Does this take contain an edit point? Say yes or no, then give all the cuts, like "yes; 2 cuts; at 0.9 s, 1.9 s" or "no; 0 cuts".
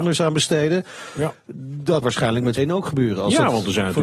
yes; 2 cuts; at 2.0 s, 2.6 s